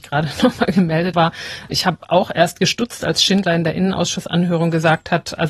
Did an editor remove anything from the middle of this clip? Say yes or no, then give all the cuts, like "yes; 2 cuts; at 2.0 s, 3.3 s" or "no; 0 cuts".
yes; 2 cuts; at 1.1 s, 1.7 s